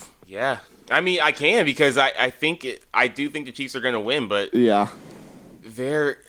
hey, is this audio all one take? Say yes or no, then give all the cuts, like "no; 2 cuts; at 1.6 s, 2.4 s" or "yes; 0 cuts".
yes; 0 cuts